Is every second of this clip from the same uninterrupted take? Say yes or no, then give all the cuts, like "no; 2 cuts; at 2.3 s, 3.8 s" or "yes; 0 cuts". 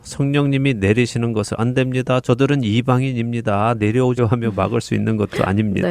no; 2 cuts; at 1.6 s, 4.2 s